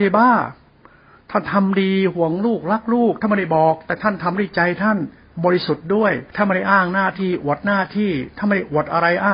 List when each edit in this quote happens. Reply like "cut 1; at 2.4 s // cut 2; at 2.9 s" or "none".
cut 1; at 6.3 s